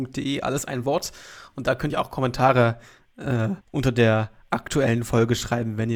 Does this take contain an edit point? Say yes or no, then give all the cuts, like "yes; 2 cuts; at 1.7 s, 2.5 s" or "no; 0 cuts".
yes; 2 cuts; at 1.9 s, 3.6 s